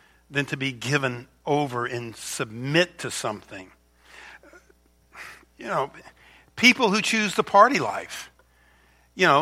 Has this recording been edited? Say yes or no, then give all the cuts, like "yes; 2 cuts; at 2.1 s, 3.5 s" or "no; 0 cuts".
no; 0 cuts